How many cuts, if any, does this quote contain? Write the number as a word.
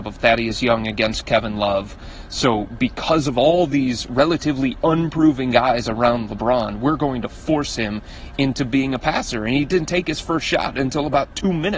zero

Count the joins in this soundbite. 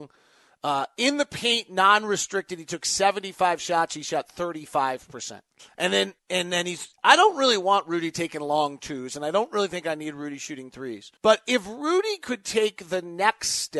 four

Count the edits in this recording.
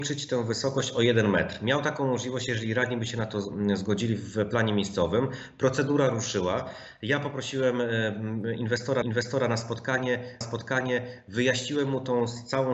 two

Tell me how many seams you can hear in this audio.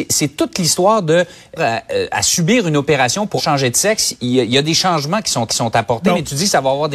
three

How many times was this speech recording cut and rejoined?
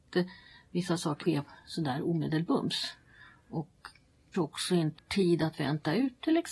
three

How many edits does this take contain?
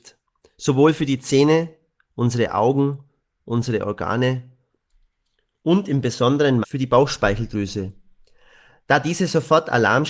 one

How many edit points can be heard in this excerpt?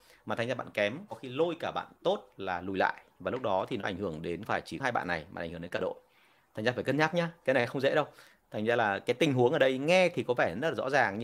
two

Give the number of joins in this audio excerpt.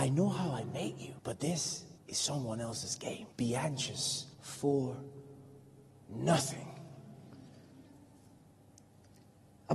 four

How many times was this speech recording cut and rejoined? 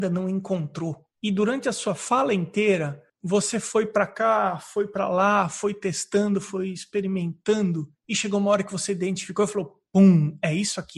three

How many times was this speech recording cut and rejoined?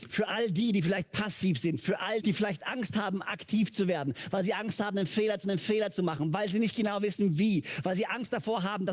two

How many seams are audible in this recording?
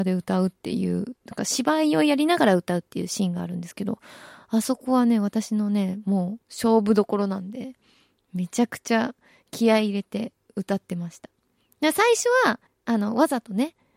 two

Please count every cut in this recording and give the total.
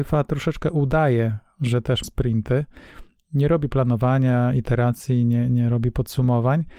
one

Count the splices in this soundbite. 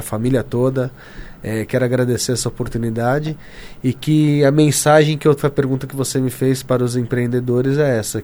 one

